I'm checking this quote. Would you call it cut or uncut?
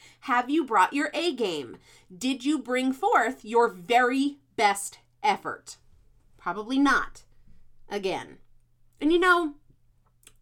uncut